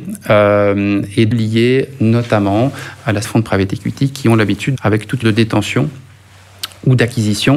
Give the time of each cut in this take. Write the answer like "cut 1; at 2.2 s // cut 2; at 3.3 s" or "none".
cut 1; at 1.3 s // cut 2; at 3.2 s // cut 3; at 4.7 s // cut 4; at 5.2 s